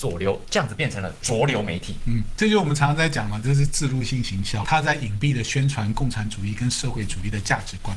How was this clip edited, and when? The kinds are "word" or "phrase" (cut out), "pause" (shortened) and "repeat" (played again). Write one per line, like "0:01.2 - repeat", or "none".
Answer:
0:04.6 - word